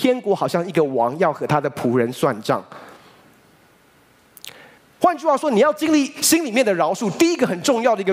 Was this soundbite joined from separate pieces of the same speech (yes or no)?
yes